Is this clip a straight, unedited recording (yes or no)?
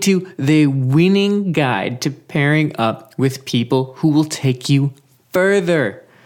yes